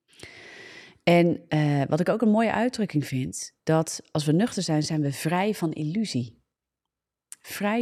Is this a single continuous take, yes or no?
no